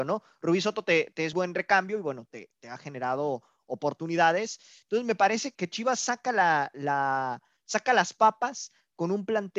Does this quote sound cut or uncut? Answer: cut